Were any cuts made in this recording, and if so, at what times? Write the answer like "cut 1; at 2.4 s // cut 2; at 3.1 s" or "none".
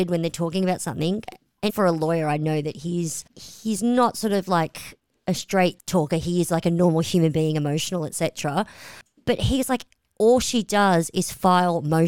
cut 1; at 1.7 s // cut 2; at 3.3 s